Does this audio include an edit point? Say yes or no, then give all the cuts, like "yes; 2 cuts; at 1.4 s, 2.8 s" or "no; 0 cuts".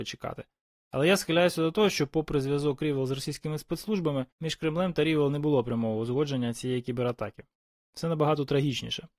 yes; 1 cut; at 4.3 s